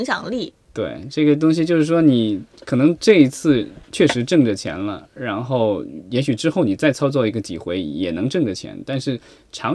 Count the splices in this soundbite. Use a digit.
1